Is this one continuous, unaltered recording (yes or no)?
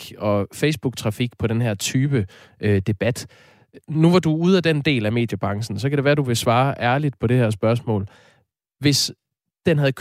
yes